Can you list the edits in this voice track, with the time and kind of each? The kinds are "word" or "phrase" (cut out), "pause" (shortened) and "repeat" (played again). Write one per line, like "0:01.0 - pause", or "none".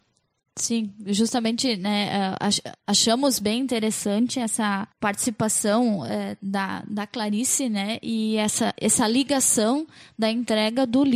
0:04.9 - pause